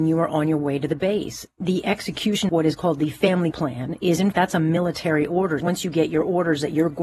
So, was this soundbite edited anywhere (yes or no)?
yes